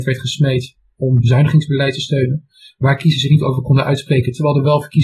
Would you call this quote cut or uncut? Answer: uncut